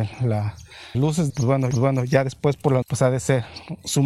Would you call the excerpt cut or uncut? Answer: cut